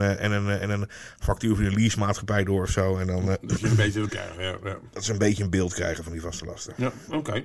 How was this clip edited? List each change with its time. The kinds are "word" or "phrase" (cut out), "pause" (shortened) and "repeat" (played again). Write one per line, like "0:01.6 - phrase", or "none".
0:04.1 - word